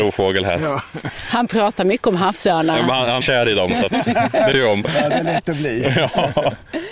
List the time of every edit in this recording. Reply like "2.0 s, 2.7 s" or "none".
3.2 s, 4.5 s

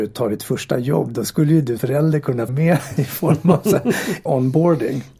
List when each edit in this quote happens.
1.8 s, 2.5 s, 4.3 s

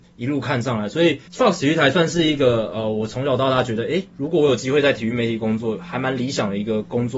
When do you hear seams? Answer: 1.3 s

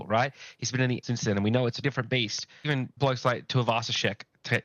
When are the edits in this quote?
1.0 s, 1.8 s, 2.6 s, 3.0 s

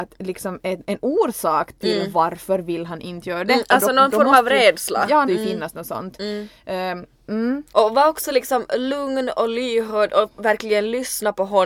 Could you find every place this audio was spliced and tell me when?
5.3 s, 7.7 s

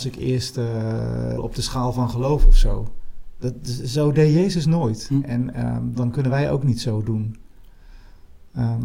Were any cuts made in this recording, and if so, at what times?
1.4 s, 6.0 s

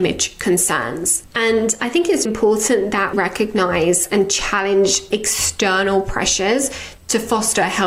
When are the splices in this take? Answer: 2.3 s, 3.1 s, 5.1 s

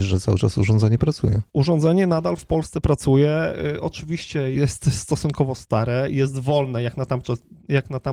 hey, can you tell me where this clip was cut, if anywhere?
1.5 s, 4.5 s

